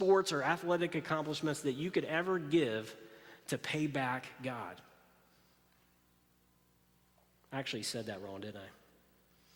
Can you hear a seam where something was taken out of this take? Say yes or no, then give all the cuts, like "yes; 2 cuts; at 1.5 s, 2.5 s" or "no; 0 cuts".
no; 0 cuts